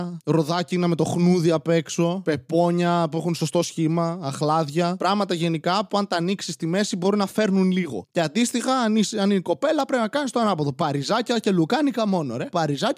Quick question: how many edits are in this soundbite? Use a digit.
0